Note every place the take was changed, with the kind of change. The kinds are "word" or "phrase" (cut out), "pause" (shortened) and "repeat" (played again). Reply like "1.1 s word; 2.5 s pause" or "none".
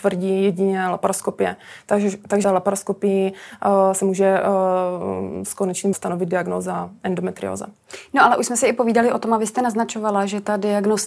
2.4 s phrase; 5.9 s word